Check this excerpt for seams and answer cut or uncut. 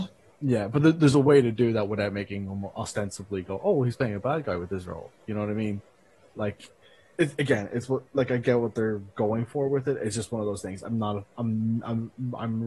cut